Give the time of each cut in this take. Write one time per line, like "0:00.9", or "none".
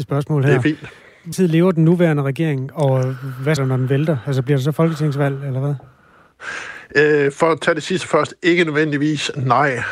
0:01.3
0:03.6